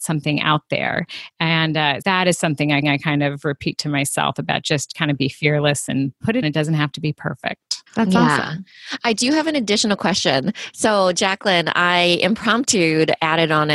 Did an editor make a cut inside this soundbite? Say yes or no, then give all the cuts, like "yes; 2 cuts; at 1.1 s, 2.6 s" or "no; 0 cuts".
yes; 4 cuts; at 2.0 s, 2.8 s, 6.4 s, 7.9 s